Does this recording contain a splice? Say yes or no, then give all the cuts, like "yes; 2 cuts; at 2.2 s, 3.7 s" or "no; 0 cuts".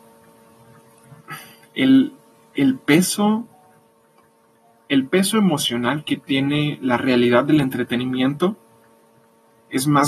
no; 0 cuts